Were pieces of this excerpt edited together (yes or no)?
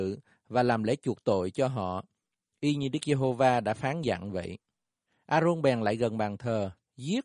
yes